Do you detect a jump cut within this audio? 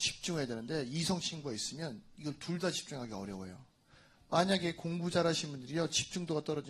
no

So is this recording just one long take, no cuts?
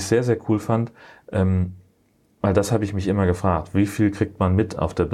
yes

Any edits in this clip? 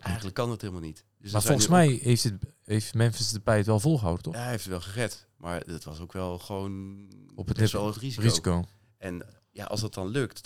yes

